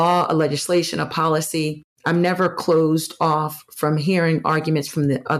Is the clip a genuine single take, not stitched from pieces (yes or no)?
no